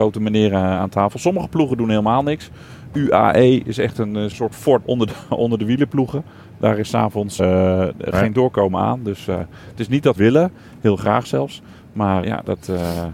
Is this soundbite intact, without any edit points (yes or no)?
no